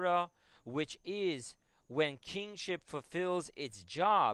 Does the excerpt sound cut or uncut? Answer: uncut